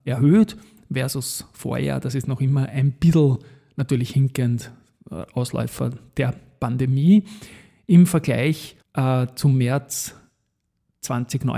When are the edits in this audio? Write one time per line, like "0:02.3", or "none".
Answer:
0:08.8